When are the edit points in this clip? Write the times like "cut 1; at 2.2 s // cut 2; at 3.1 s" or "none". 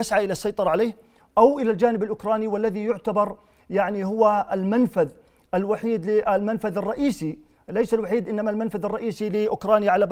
none